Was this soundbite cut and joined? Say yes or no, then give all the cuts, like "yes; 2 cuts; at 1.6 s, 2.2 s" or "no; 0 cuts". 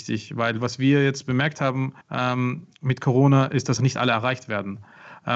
yes; 2 cuts; at 2.0 s, 3.8 s